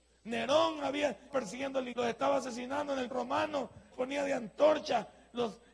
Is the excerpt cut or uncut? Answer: cut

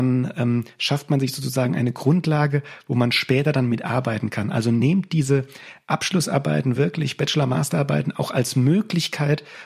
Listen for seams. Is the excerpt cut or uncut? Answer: uncut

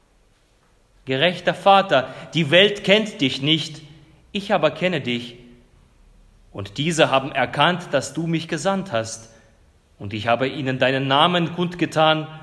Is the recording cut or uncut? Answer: uncut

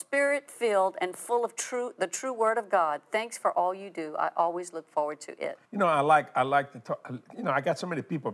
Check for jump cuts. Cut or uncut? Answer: cut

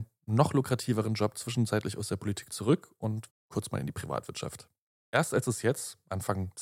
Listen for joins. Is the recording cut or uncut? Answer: cut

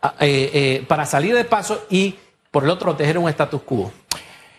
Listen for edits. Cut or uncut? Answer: cut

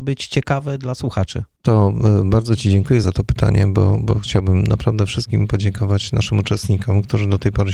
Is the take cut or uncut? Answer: uncut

